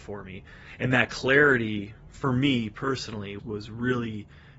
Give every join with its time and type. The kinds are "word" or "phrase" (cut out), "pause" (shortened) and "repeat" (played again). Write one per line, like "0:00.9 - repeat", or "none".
0:03.4 - word